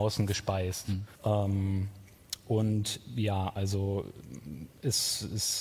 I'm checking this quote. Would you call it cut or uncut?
cut